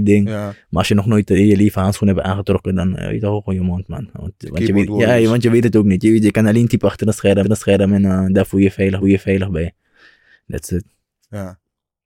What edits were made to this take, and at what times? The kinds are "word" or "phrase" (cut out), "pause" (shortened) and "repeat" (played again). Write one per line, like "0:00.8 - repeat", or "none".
0:07.4 - repeat
0:09.0 - repeat